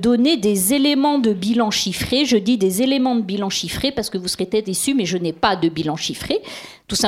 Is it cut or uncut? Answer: uncut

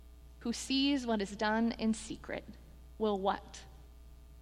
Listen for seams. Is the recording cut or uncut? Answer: uncut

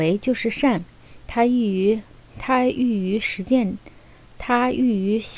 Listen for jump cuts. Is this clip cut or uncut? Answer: uncut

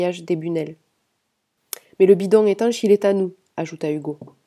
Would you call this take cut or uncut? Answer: uncut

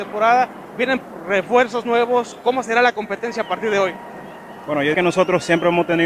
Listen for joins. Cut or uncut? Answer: cut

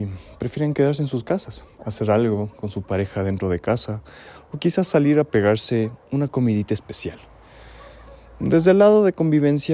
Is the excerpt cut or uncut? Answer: cut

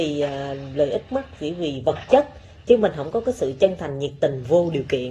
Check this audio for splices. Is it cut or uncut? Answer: cut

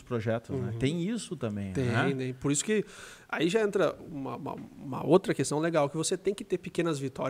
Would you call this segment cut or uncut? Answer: uncut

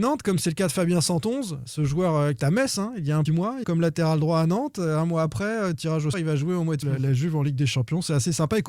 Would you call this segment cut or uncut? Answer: cut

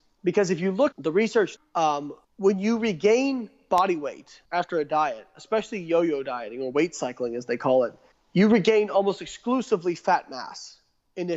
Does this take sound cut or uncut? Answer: cut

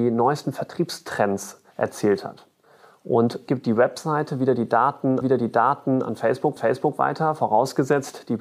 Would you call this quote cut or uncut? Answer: cut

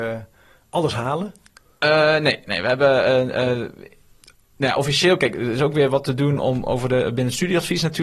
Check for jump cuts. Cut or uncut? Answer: uncut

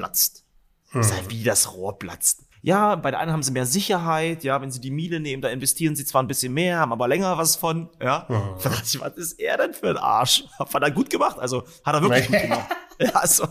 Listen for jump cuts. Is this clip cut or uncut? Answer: cut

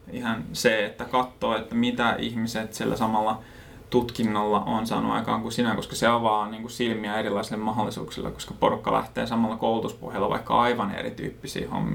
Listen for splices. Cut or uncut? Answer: uncut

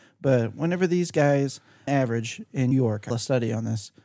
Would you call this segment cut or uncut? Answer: cut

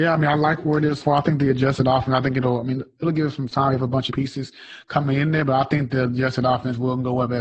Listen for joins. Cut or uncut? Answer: cut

